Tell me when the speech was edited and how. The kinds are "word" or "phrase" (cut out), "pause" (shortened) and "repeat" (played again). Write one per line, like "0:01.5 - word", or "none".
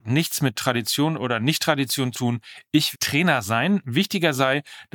0:02.1 - word
0:02.9 - word